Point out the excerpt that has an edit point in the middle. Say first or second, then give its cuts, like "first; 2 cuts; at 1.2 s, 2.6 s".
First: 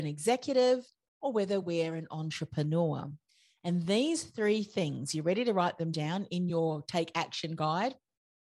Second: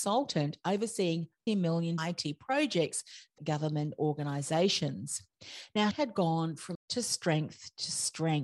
second; 5 cuts; at 1.5 s, 2.0 s, 3.4 s, 5.9 s, 6.7 s